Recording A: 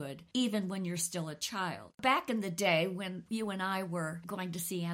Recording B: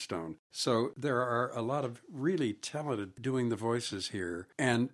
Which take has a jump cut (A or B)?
B